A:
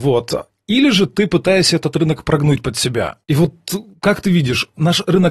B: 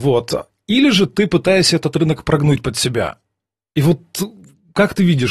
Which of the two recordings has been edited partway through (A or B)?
A